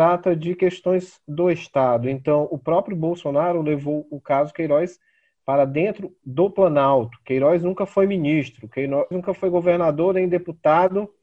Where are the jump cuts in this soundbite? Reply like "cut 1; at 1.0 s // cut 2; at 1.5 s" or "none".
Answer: cut 1; at 9.1 s